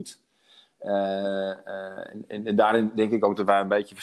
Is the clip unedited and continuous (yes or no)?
yes